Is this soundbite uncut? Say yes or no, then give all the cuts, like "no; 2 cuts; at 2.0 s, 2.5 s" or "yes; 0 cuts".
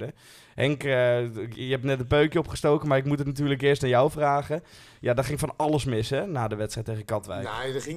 yes; 0 cuts